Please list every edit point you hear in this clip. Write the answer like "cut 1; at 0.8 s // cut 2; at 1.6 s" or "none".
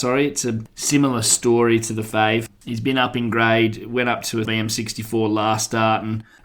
cut 1; at 4.4 s